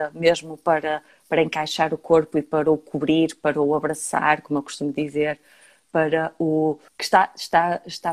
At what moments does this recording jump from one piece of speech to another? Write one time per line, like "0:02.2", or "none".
0:06.9